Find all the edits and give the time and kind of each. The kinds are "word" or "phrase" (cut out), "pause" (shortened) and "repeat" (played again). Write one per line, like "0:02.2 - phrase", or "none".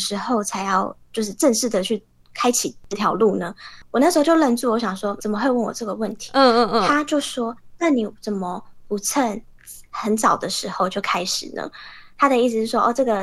0:05.2 - word